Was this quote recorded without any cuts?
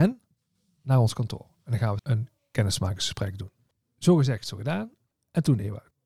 no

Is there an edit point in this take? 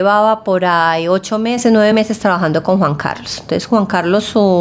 no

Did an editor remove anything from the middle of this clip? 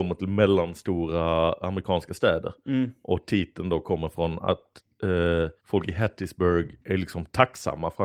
yes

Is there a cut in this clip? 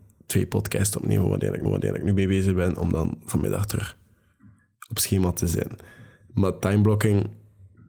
yes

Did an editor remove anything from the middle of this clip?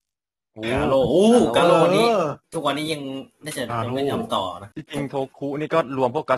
no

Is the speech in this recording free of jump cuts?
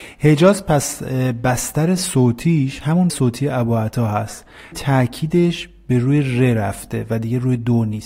no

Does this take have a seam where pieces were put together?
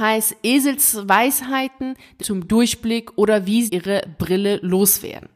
yes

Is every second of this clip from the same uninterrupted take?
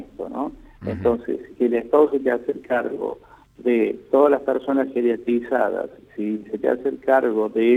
no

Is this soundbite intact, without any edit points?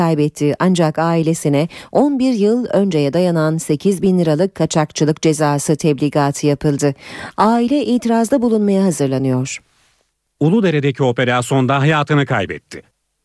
yes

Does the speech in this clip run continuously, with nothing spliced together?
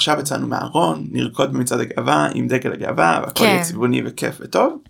yes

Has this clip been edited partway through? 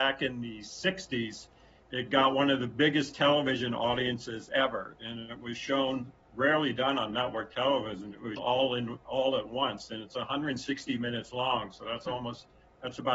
yes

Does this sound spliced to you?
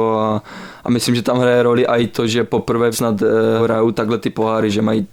yes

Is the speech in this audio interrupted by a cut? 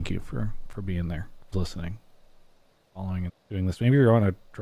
yes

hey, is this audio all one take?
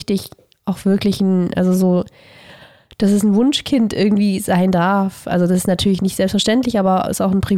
yes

